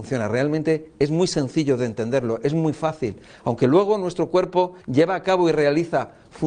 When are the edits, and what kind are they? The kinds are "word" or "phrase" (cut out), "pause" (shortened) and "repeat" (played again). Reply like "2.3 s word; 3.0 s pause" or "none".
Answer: 4.8 s pause